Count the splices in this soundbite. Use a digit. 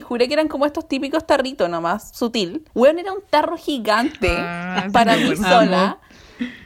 1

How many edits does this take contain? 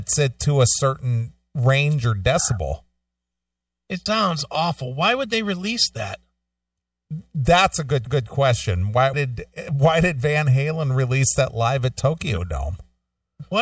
3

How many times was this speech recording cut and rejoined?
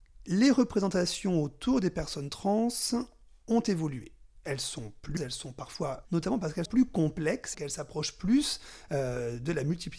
4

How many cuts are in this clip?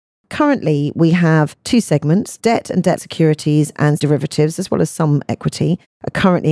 3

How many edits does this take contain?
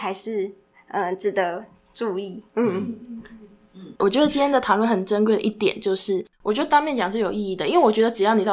2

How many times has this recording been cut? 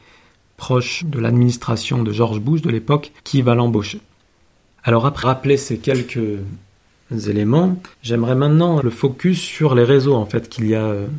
6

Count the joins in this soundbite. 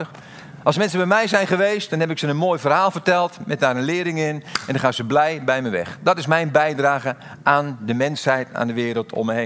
0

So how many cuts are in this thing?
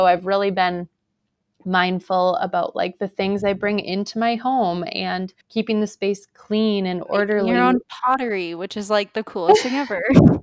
1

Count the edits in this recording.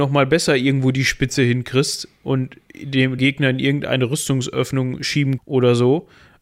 2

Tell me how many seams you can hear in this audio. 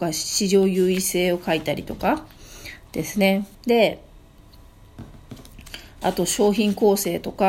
1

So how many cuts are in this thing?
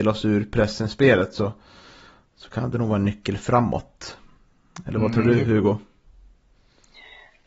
0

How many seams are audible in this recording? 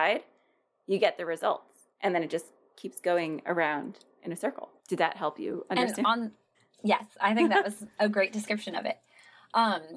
3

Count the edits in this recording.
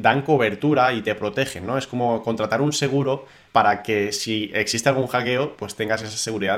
1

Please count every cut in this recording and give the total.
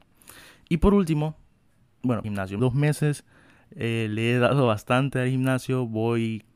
2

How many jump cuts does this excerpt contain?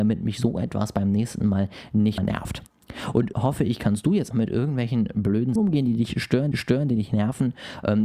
5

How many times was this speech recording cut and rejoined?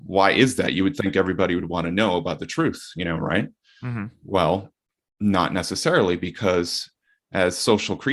0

